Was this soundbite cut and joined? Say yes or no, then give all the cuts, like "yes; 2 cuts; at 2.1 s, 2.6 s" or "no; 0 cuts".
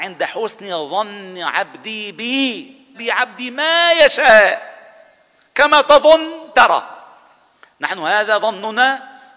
yes; 1 cut; at 2.9 s